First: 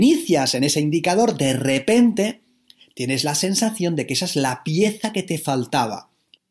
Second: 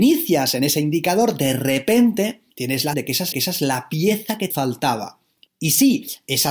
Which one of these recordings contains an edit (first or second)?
second